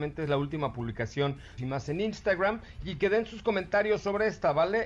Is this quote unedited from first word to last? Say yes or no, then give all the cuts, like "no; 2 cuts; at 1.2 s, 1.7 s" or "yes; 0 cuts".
no; 1 cut; at 1.6 s